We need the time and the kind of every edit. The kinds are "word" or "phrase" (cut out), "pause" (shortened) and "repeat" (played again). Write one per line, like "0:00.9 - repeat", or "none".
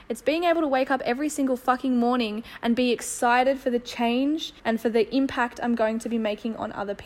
0:04.6 - pause